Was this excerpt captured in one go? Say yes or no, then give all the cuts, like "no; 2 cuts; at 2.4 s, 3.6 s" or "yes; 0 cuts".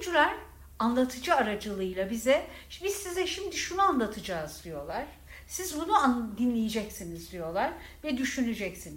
yes; 0 cuts